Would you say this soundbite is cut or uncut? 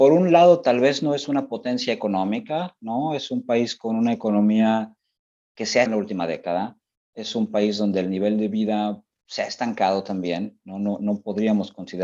cut